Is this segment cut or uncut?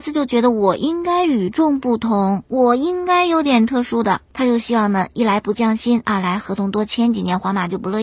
cut